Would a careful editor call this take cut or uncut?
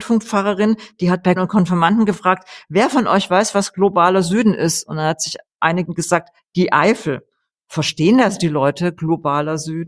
cut